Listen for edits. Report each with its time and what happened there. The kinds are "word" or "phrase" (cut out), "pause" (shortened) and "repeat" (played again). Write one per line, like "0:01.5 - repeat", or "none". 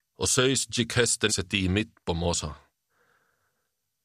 0:01.3 - word